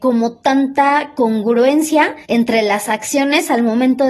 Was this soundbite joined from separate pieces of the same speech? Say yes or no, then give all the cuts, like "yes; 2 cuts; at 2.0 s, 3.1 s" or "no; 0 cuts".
yes; 1 cut; at 2.2 s